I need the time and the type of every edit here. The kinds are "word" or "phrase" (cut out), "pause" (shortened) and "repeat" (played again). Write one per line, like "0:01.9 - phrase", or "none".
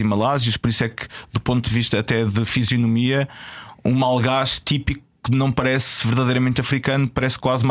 none